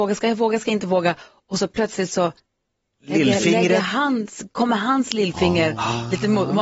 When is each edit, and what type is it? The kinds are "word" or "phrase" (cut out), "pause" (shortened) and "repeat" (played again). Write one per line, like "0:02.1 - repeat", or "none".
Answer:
none

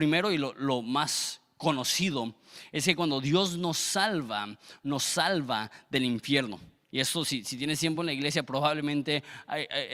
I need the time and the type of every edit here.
none

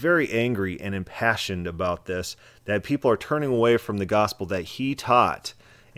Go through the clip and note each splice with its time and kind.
none

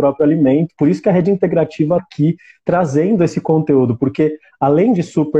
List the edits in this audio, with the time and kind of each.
0:02.0 - word

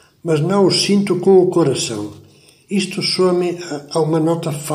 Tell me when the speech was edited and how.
none

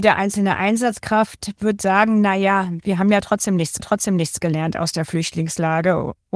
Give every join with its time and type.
0:03.8 - repeat

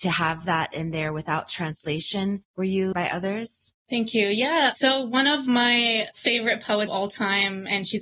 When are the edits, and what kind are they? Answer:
0:02.9 - word
0:03.8 - pause
0:06.9 - word

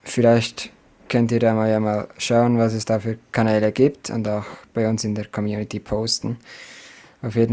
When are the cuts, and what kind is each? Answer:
none

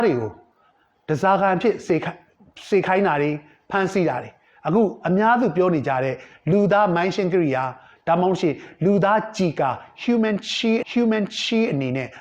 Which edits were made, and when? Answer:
0:10.8 - repeat

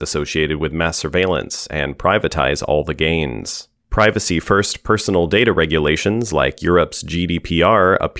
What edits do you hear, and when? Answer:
0:03.8 - pause

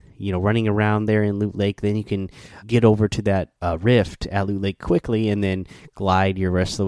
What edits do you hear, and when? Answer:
0:02.6 - word
0:03.6 - pause

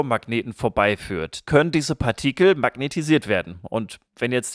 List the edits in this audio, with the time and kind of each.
0:01.4 - word

